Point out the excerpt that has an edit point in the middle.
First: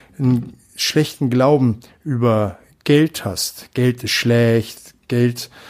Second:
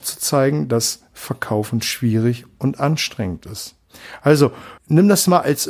second; 1 cut; at 4.8 s

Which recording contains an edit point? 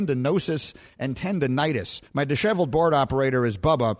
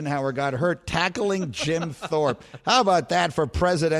first; 1 cut; at 2.1 s

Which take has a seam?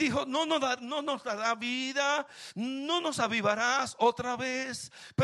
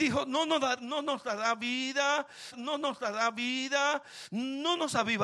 second; 1 cut; at 2.5 s

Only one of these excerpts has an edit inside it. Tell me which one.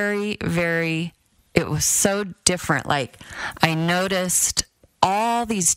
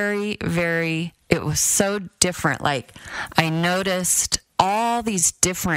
second; 2 cuts; at 1.2 s, 4.5 s

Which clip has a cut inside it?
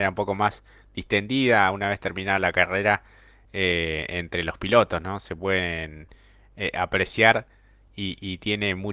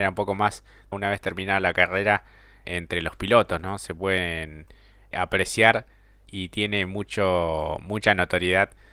second; 4 cuts; at 0.9 s, 2.6 s, 5.1 s, 6.3 s

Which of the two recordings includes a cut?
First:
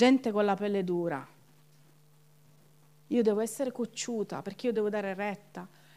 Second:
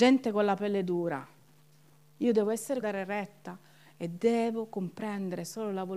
second; 2 cuts; at 1.9 s, 2.8 s

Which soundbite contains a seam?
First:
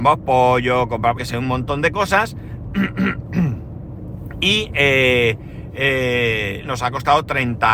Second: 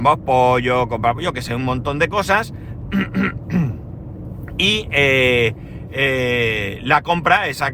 first; 2 cuts; at 1.2 s, 6.6 s

